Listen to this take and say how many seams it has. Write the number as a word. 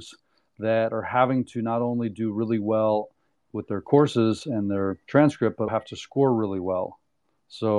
two